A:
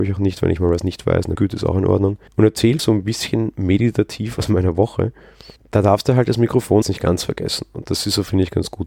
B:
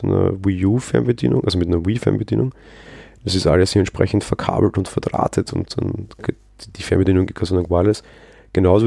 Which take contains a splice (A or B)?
A